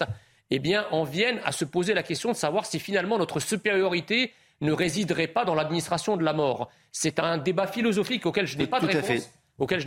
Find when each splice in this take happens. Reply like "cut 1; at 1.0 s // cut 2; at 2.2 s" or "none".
none